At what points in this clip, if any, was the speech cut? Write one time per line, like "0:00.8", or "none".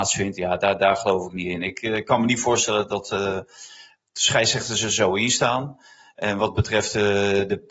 none